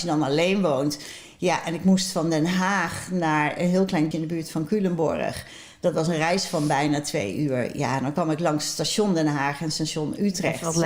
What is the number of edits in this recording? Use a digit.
1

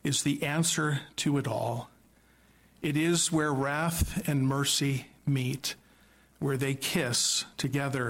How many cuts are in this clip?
0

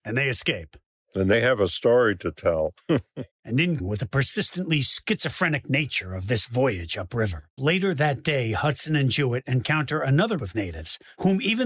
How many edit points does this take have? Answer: 3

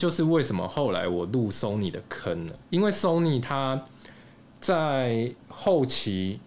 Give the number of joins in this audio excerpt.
2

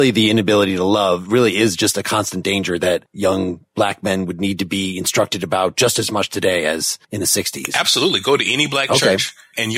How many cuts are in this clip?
1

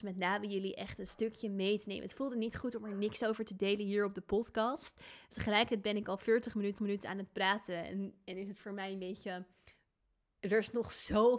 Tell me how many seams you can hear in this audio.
1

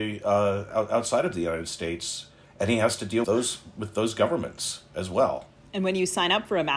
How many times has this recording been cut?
3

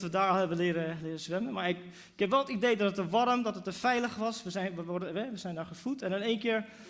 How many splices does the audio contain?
0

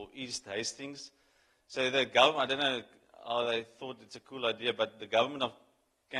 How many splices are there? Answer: 0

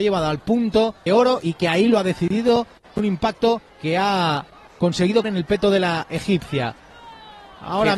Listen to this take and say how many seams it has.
4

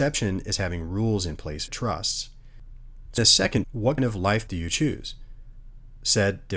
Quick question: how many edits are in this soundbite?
5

